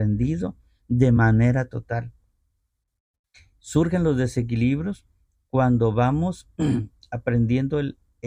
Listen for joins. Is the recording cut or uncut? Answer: uncut